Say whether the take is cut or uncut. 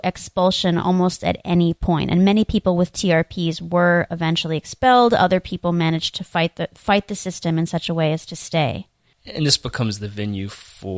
uncut